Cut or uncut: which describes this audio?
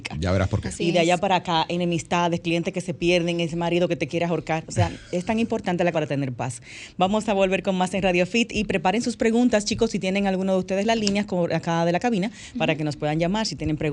cut